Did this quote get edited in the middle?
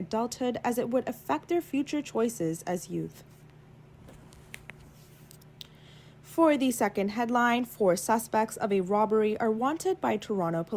no; 0 cuts

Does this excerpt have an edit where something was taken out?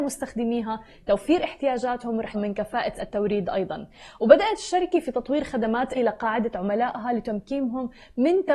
yes; 3 cuts; at 2.3 s, 2.9 s, 5.9 s

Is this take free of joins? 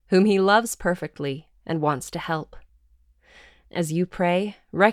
yes; 0 cuts

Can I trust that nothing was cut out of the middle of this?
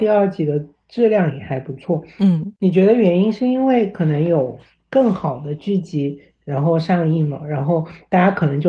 yes; 0 cuts

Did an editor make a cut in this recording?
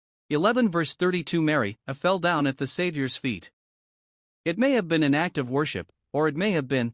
no; 0 cuts

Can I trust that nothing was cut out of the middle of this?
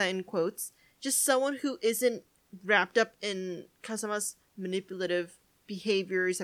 yes; 0 cuts

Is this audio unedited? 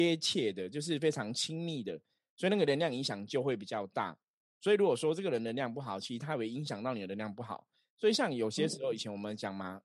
yes; 0 cuts

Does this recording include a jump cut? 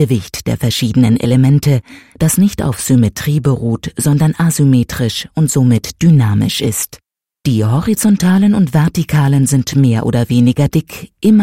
no; 0 cuts

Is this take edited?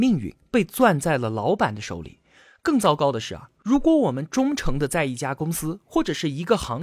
no; 0 cuts

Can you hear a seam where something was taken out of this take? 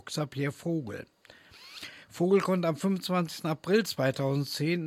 no; 0 cuts

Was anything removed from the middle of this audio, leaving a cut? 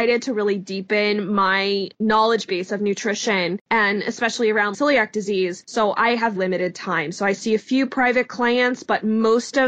yes; 2 cuts; at 4.7 s, 6.4 s

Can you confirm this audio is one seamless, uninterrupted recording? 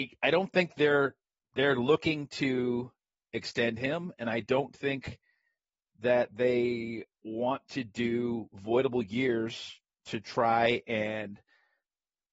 yes; 0 cuts

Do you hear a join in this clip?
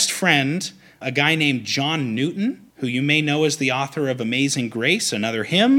yes; 2 cuts; at 1.0 s, 2.7 s

